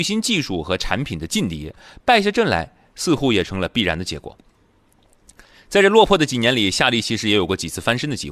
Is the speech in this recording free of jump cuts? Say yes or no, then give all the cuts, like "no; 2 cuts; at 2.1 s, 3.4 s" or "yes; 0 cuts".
yes; 0 cuts